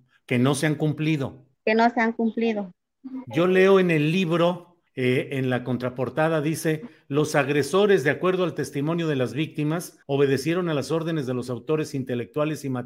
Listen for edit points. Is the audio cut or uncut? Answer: cut